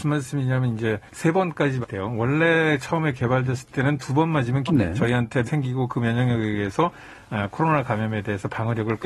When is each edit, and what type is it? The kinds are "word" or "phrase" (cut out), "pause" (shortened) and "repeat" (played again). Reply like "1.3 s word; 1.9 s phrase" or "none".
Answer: 1.1 s pause; 1.8 s word; 4.7 s phrase; 5.4 s word

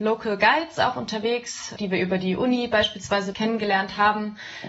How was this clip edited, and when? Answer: 1.8 s word; 3.3 s word

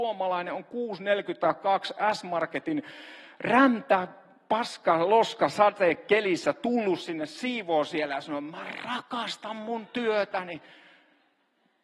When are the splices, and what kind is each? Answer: none

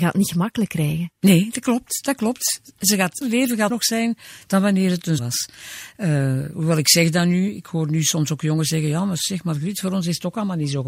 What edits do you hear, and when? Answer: 3.2 s word; 3.7 s phrase; 5.2 s word

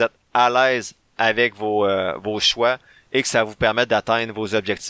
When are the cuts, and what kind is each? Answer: none

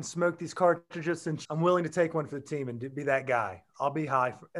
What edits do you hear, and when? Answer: 1.4 s phrase

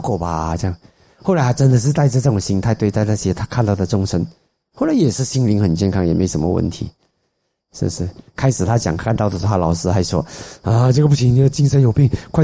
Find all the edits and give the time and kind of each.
none

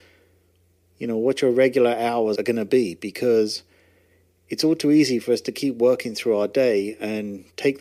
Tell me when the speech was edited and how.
2.4 s word

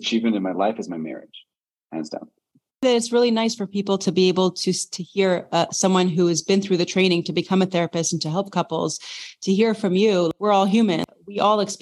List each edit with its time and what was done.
none

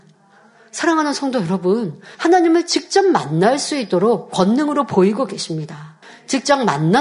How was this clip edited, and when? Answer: 2.1 s word; 6.0 s pause

